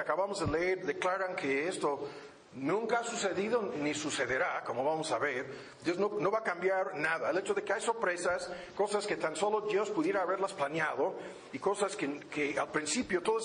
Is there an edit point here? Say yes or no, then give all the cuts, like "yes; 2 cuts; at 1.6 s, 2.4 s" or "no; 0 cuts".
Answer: no; 0 cuts